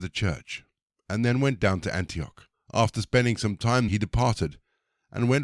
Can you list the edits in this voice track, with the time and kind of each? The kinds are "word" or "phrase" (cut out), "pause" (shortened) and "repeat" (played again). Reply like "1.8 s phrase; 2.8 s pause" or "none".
2.5 s pause; 3.9 s word

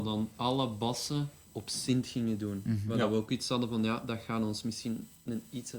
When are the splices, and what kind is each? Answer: 1.5 s word

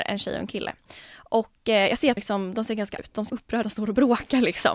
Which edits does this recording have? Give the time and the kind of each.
2.2 s word; 3.0 s word; 3.3 s word; 3.6 s word

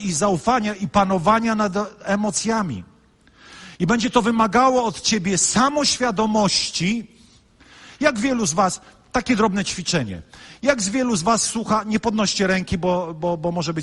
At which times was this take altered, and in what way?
none

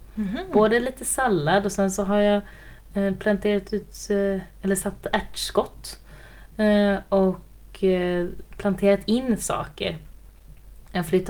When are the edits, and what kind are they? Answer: none

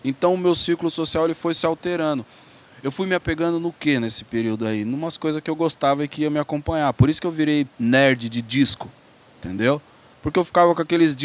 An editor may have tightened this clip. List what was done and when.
7.7 s pause

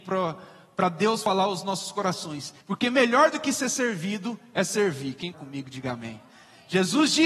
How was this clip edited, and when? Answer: 2.6 s pause; 5.3 s word

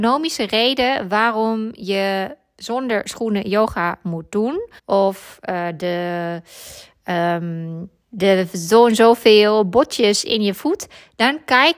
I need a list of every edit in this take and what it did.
4.8 s pause; 8.0 s pause

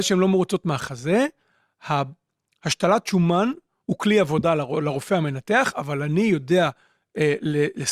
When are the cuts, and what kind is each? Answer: none

